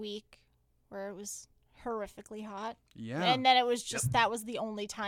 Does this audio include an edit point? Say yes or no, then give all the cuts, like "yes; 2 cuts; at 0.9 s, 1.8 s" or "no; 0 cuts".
no; 0 cuts